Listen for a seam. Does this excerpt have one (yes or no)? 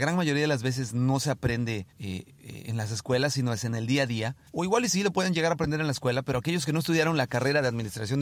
yes